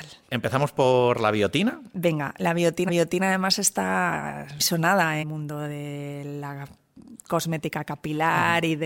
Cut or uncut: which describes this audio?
cut